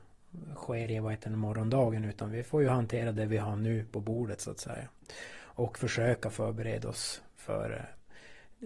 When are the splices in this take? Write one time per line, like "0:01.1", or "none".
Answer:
none